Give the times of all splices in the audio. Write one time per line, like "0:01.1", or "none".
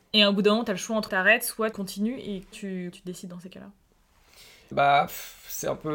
0:01.1
0:01.7
0:02.5
0:02.9
0:04.7